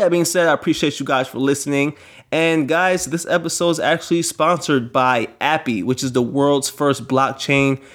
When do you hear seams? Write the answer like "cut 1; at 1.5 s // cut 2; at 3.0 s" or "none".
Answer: none